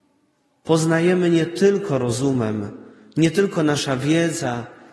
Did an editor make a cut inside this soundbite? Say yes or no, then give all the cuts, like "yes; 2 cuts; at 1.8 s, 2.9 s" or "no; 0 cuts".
no; 0 cuts